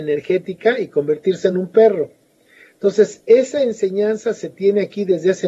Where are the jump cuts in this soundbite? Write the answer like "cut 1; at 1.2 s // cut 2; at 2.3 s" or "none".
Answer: none